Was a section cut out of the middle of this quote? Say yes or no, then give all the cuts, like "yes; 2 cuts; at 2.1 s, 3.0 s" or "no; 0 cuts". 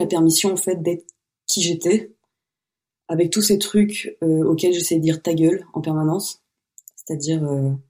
no; 0 cuts